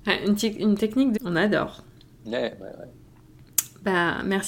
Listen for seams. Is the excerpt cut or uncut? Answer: cut